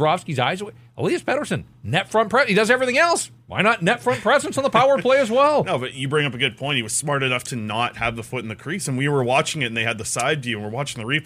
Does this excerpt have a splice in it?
no; 0 cuts

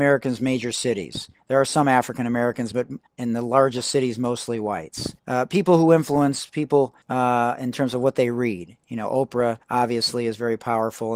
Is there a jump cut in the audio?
yes; 4 cuts; at 3.1 s, 5.2 s, 7.0 s, 9.6 s

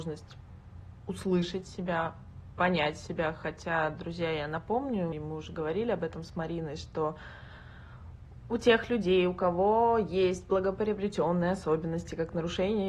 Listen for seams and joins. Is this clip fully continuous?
no; 1 cut; at 5.1 s

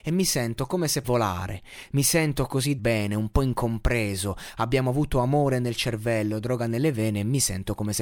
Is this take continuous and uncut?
no; 2 cuts; at 1.0 s, 2.8 s

